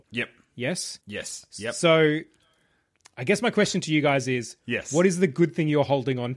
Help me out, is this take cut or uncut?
uncut